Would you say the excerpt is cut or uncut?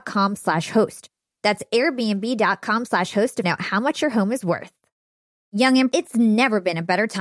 cut